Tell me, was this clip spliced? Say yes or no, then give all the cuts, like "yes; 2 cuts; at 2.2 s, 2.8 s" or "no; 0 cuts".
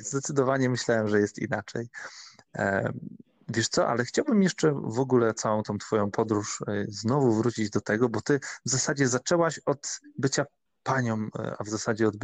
yes; 1 cut; at 10.7 s